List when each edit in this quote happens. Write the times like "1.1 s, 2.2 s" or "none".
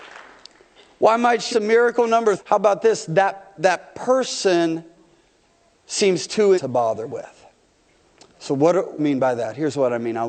1.5 s, 2.4 s, 6.5 s, 9.0 s